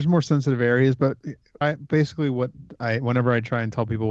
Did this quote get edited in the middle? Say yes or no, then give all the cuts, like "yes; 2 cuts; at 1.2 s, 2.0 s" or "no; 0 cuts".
yes; 1 cut; at 1.6 s